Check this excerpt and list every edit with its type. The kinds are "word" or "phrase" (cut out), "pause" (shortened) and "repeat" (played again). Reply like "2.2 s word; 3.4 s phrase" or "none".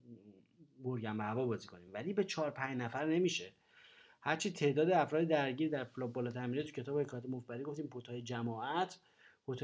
none